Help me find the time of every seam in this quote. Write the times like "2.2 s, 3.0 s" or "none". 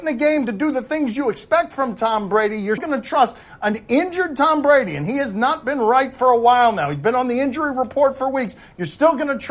2.8 s